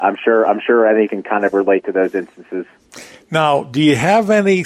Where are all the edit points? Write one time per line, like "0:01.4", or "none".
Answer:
0:01.1